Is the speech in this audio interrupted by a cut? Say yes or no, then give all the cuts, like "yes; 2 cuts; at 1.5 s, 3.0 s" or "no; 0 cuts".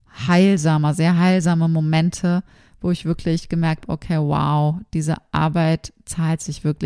yes; 1 cut; at 3.8 s